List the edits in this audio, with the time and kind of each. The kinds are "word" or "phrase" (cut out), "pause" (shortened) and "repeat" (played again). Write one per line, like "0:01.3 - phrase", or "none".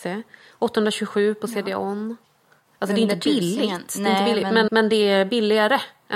0:04.7 - word